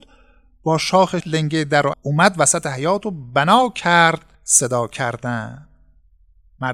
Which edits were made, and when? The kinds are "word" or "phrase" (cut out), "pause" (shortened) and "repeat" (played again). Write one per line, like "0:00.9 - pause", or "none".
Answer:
0:01.2 - word
0:01.9 - word
0:04.3 - pause